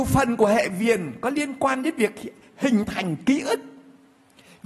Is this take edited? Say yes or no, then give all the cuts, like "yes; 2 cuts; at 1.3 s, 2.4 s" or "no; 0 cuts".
no; 0 cuts